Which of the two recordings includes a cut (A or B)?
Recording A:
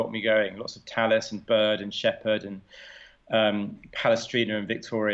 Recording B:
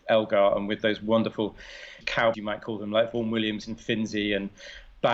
B